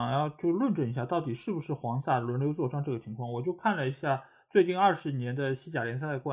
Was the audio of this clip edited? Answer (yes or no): no